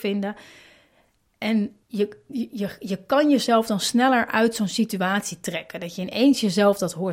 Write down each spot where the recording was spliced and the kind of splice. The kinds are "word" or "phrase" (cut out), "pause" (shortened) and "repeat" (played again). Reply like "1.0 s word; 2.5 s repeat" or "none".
1.8 s pause